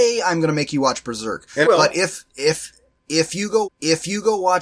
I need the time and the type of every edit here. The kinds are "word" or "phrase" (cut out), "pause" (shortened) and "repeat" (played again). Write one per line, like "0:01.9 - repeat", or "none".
0:01.6 - word
0:03.6 - repeat